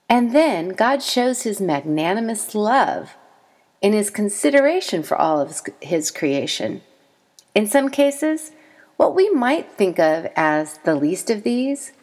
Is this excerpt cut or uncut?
uncut